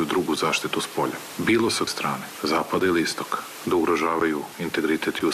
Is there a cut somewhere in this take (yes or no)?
yes